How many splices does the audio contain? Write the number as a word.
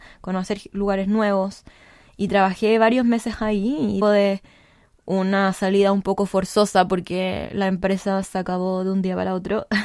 one